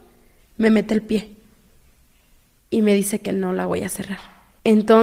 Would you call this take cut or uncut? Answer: uncut